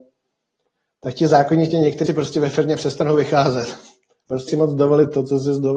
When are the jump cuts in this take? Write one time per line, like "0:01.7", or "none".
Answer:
0:02.1
0:04.5